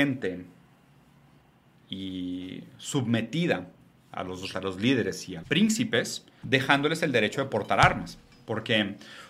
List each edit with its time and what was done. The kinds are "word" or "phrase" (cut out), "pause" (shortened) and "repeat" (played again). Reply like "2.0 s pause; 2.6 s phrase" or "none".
1.8 s word; 4.1 s word; 4.5 s word; 5.4 s word; 6.4 s word